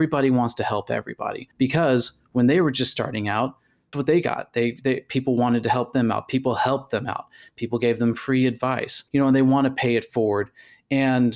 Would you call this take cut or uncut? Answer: cut